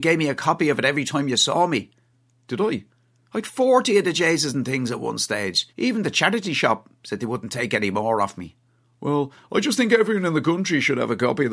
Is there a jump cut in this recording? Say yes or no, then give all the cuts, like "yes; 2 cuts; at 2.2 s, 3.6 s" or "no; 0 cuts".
no; 0 cuts